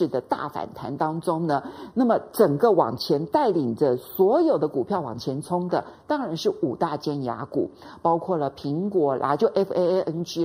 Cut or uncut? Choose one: uncut